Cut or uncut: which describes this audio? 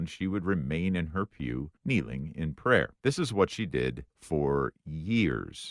cut